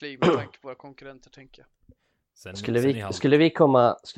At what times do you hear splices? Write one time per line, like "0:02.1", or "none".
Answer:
none